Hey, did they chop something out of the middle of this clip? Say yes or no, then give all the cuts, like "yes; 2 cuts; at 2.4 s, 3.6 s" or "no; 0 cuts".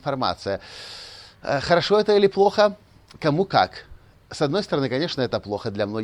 no; 0 cuts